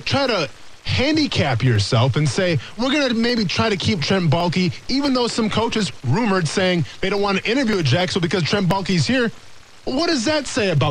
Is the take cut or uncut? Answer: cut